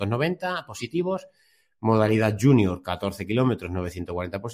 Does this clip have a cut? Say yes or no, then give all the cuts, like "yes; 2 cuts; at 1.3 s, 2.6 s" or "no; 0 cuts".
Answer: no; 0 cuts